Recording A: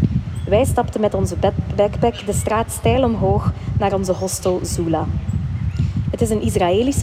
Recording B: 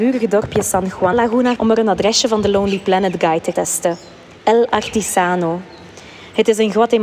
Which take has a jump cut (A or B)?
B